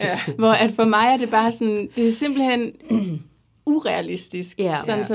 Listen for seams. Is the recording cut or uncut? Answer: uncut